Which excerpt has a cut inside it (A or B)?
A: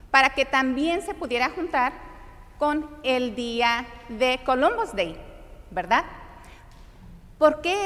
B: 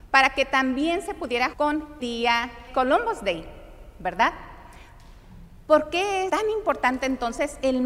B